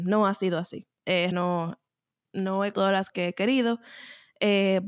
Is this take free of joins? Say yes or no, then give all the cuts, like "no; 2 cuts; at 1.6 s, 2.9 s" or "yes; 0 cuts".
no; 3 cuts; at 1.3 s, 2.7 s, 3.1 s